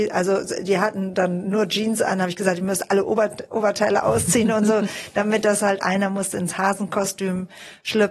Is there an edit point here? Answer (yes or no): yes